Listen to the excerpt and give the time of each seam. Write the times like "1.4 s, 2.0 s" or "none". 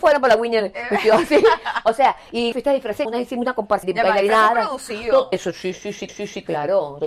2.5 s, 3.0 s, 3.8 s, 5.3 s, 6.1 s